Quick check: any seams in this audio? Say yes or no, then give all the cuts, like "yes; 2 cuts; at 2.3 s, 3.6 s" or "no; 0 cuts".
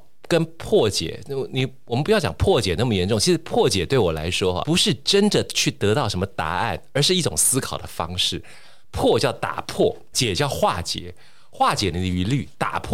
yes; 2 cuts; at 4.6 s, 10.1 s